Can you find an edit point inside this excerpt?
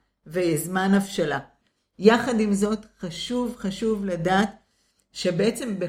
no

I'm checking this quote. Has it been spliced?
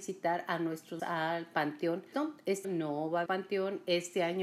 yes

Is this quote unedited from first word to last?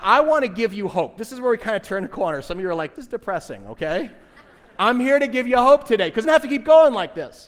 no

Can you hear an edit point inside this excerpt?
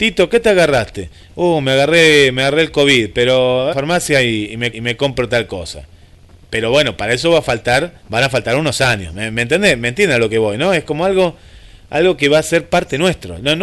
yes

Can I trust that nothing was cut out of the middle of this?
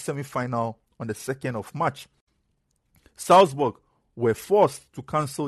yes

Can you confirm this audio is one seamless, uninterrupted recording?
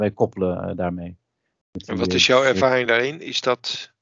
yes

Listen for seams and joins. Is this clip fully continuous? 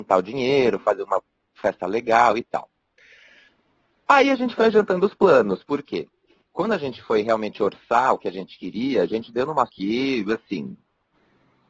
no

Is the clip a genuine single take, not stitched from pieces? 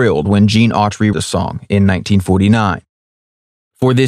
no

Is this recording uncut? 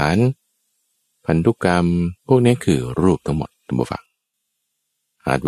no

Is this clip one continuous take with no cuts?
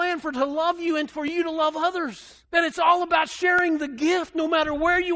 no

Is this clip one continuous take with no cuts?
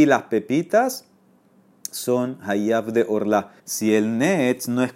no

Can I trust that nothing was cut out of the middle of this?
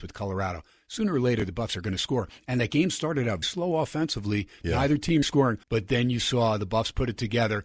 no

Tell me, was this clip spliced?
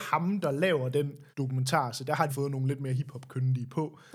yes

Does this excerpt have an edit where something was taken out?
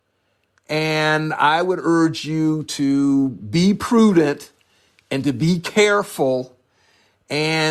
no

